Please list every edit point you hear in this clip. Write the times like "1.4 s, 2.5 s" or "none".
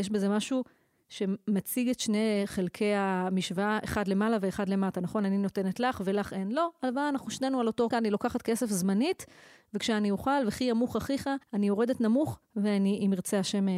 7.9 s, 11.4 s